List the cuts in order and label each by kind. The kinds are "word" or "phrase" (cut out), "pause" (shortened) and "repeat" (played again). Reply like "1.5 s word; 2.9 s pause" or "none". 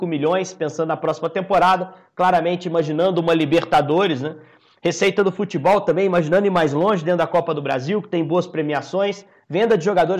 none

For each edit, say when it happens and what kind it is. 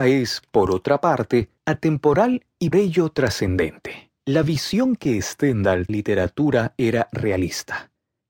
1.6 s pause; 2.7 s word; 4.2 s pause; 5.9 s phrase

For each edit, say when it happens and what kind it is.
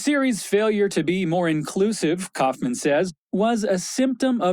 none

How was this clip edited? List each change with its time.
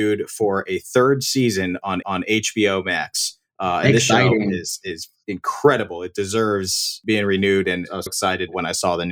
2.0 s repeat; 8.1 s word

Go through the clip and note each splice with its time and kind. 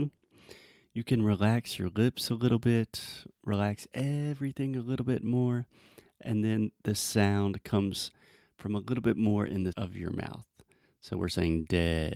9.7 s word

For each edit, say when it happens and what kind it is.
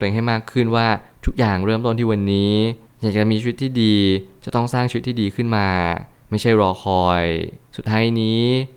none

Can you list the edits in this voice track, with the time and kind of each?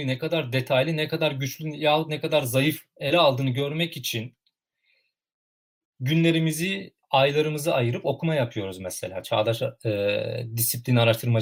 7.0 s pause

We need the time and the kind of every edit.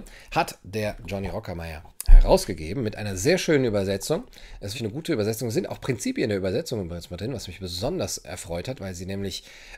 1.0 s word; 2.0 s pause; 4.7 s word

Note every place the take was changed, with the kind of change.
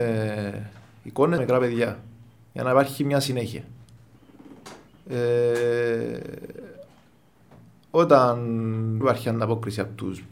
1.4 s word; 9.0 s word

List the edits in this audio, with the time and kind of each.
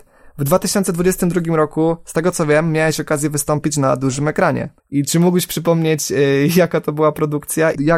4.8 s pause

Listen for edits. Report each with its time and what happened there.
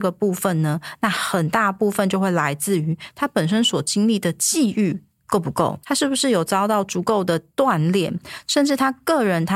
5.8 s pause

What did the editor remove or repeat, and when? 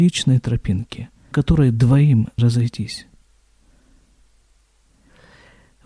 1.3 s word; 2.4 s word

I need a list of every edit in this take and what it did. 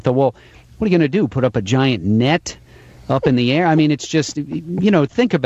none

